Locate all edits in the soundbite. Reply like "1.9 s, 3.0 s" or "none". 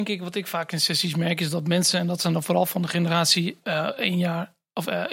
none